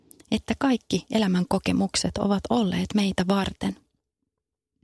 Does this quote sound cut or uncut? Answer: uncut